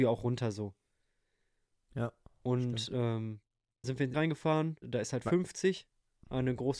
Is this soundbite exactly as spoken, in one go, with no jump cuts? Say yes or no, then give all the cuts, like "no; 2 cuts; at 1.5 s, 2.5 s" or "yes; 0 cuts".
no; 3 cuts; at 3.8 s, 4.1 s, 4.8 s